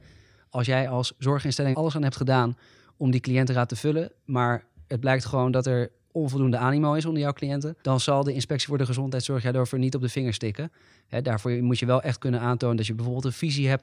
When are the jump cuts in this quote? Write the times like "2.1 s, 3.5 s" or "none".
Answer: 1.7 s, 7.8 s